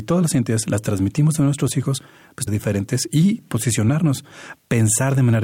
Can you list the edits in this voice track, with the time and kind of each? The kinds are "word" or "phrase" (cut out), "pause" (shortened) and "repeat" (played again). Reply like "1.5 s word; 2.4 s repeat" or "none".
2.5 s phrase